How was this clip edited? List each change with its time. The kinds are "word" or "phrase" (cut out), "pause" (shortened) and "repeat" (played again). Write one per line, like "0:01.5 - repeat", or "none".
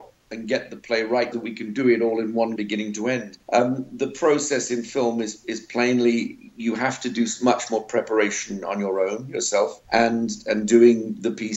0:01.3 - word
0:02.6 - phrase
0:03.4 - pause
0:09.8 - pause